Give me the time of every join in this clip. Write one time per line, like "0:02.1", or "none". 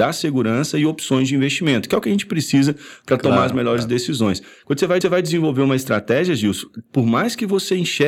0:05.0